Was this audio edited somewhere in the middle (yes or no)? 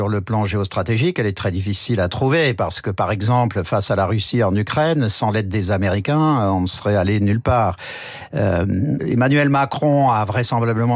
yes